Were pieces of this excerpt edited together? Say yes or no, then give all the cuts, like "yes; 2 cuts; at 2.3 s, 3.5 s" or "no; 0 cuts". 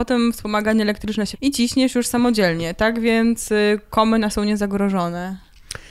yes; 2 cuts; at 1.3 s, 4.3 s